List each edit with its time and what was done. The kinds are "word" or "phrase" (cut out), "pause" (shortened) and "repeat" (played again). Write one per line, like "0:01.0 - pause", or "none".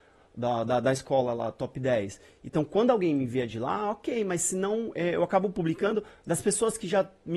none

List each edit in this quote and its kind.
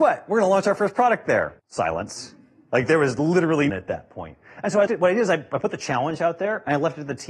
0:01.6 - pause
0:03.7 - phrase
0:04.9 - word

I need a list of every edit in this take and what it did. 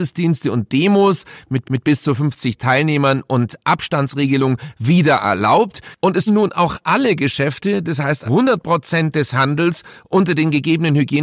0:01.6 - repeat
0:06.3 - word
0:08.3 - word

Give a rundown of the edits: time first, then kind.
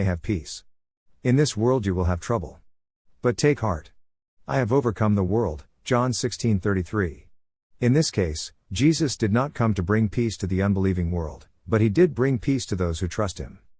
none

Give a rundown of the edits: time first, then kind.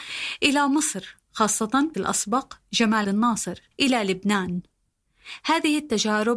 0:01.9 - phrase
0:03.0 - word
0:03.7 - pause

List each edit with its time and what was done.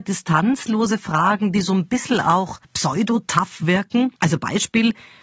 0:02.6 - pause
0:04.2 - pause

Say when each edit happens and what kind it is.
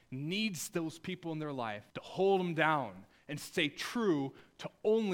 0:01.9 - pause

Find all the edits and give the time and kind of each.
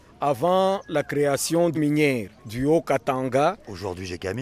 0:01.7 - word
0:02.4 - pause

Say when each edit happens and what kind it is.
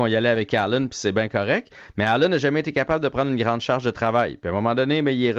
none

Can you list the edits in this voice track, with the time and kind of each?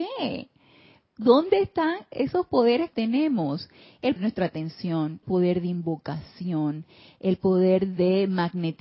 0:02.9 - word
0:04.2 - word
0:05.2 - word

